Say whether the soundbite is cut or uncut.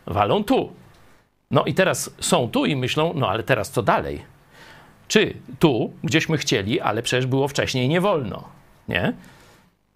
uncut